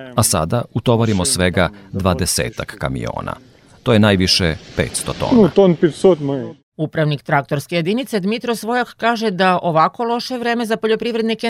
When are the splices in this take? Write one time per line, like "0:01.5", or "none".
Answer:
none